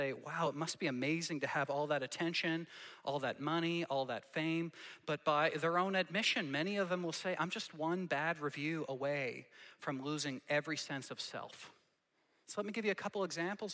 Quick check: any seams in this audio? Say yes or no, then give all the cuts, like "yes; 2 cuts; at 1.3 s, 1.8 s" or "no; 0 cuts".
no; 0 cuts